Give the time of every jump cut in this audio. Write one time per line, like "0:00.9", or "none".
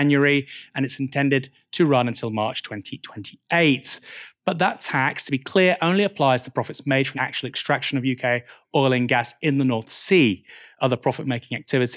0:07.1